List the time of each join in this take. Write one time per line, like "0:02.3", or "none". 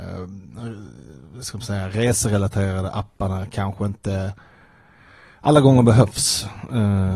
none